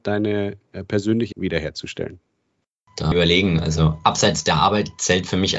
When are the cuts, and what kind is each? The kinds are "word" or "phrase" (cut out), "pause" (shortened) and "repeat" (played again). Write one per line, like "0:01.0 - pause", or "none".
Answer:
0:01.3 - word
0:03.1 - phrase